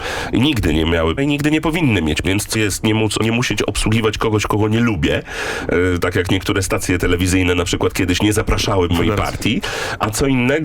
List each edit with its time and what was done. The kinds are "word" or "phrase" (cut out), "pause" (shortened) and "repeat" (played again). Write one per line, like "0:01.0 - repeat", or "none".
0:01.2 - word
0:02.2 - word
0:02.5 - word
0:03.2 - word
0:08.9 - word

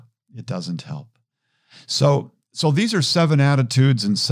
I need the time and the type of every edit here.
none

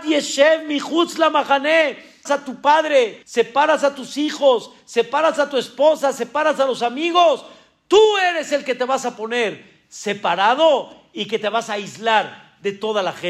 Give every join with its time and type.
0:02.3 - word
0:03.2 - pause

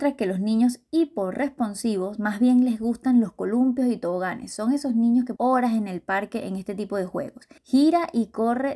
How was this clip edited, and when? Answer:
0:05.4 - phrase
0:07.6 - pause

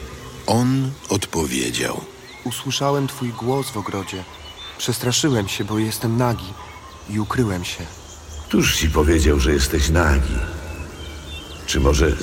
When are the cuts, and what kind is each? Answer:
none

